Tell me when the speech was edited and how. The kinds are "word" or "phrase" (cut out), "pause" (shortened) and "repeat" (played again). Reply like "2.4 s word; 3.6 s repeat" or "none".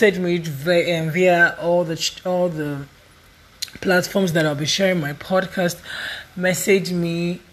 none